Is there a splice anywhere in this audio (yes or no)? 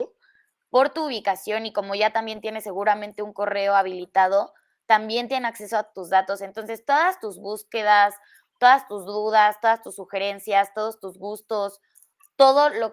no